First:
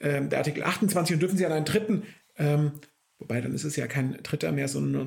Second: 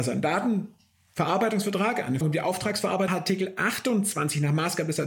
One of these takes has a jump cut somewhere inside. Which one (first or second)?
second